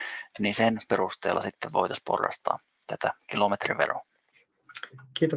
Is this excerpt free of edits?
yes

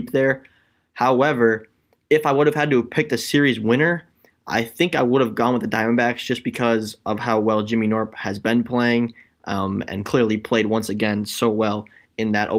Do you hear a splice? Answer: no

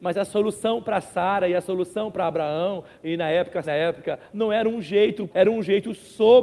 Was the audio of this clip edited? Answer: yes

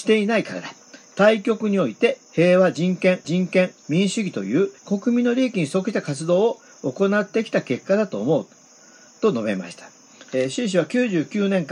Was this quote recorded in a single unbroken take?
no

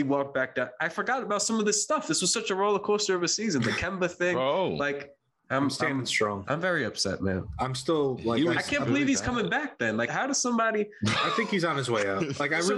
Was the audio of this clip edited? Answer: yes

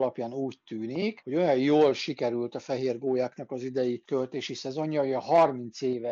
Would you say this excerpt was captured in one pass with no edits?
yes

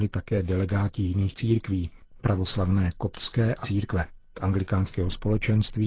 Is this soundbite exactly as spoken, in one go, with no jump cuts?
no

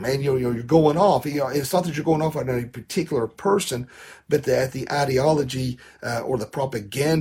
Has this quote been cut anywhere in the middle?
no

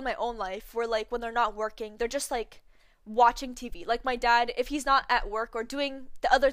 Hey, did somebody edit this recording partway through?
no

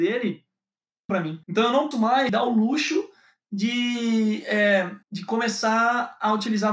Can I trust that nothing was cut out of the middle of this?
no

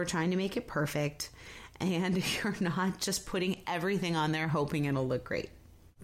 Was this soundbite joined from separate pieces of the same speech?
no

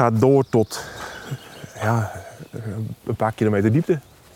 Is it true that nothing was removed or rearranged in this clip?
yes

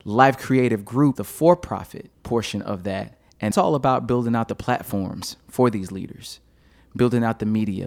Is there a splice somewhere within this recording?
yes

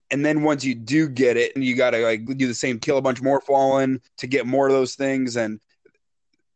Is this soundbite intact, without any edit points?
no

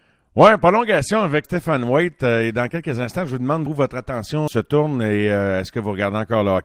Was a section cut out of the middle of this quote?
yes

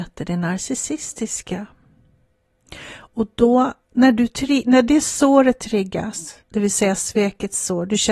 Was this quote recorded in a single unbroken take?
no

